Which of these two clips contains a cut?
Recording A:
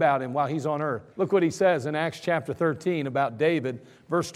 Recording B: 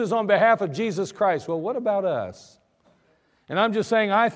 A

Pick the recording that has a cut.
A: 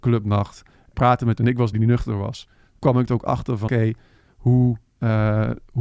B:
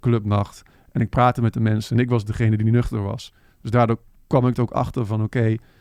A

